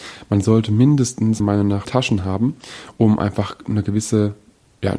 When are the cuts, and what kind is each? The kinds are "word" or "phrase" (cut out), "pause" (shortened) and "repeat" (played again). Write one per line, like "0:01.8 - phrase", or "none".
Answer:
0:01.4 - word
0:01.8 - word